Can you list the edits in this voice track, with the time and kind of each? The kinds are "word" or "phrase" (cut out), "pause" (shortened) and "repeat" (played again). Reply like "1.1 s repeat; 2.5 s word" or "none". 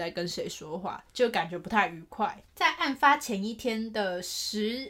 2.5 s pause